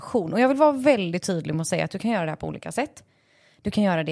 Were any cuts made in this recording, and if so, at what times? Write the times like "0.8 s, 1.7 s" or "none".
none